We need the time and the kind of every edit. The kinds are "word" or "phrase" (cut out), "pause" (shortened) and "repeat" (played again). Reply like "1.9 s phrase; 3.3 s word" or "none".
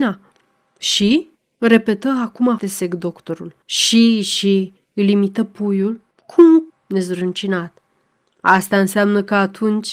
1.4 s pause; 2.6 s word; 3.6 s pause; 4.8 s pause; 6.1 s pause; 6.7 s word